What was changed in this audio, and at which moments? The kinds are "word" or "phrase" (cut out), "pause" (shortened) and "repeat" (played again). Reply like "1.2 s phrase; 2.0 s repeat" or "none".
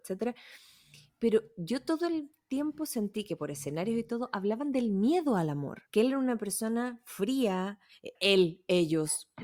5.9 s pause; 8.1 s word